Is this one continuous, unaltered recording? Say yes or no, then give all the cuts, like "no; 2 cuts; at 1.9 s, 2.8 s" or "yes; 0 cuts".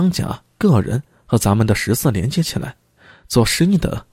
yes; 0 cuts